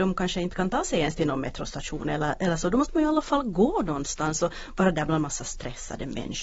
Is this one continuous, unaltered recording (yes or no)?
yes